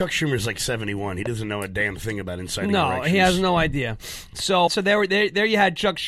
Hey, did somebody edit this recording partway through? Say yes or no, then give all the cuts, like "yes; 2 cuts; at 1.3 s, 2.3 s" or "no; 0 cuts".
yes; 1 cut; at 4.7 s